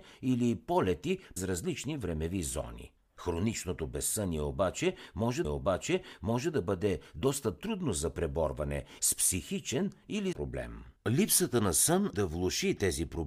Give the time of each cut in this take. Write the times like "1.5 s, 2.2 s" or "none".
1.4 s, 5.4 s, 9.0 s, 10.3 s, 12.1 s